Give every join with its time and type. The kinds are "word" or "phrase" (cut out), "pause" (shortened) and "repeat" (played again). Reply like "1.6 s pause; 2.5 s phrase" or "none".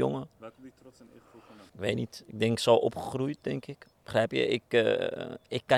1.7 s pause; 3.9 s pause